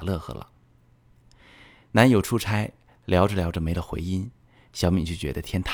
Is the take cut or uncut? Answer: uncut